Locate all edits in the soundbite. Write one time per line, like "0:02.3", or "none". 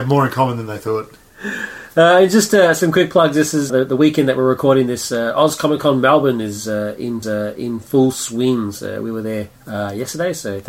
0:03.7
0:07.2
0:09.6